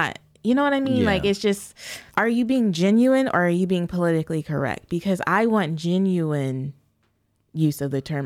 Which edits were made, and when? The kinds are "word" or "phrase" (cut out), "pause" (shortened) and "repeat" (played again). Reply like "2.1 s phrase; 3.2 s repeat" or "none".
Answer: 2.1 s pause